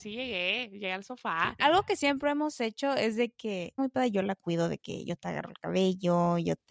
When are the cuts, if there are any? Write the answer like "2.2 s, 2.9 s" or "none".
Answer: 3.8 s